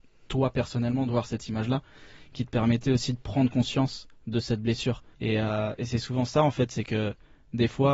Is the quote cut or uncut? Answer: cut